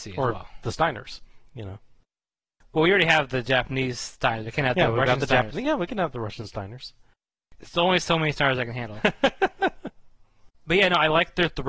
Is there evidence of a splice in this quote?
yes; 2 cuts; at 1.5 s, 10.5 s

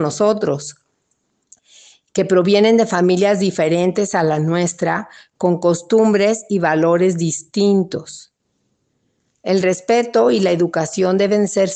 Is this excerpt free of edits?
yes; 0 cuts

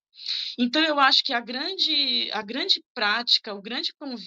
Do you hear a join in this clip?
no; 0 cuts

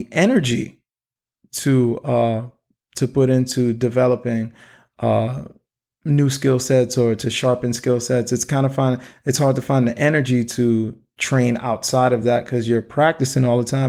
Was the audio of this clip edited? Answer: no; 0 cuts

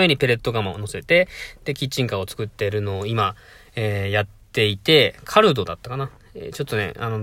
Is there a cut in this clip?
no; 0 cuts

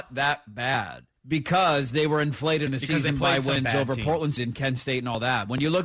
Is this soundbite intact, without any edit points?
no; 3 cuts; at 1.2 s, 2.7 s, 4.4 s

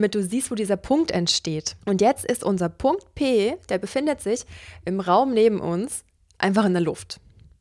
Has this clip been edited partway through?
yes; 1 cut; at 1.8 s

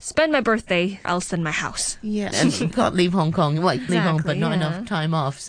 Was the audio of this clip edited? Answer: yes; 4 cuts; at 1.0 s, 2.3 s, 2.7 s, 3.9 s

